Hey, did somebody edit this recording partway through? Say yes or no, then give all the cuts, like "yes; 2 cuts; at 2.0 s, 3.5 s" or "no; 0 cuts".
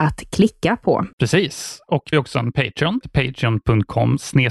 yes; 3 cuts; at 1.1 s, 2.1 s, 3.0 s